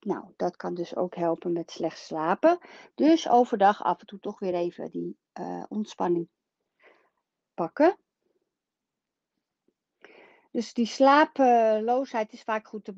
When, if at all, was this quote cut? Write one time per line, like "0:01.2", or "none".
none